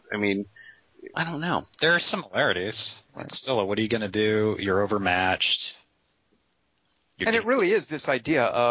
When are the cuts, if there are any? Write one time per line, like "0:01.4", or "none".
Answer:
0:01.1
0:01.7
0:03.1